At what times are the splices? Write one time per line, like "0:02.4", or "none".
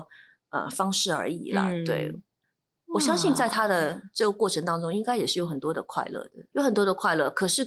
0:02.4
0:06.5